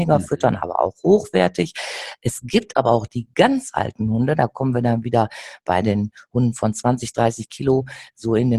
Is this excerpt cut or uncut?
uncut